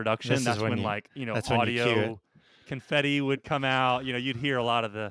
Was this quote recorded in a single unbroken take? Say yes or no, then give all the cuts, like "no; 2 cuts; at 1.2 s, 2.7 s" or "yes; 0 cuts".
yes; 0 cuts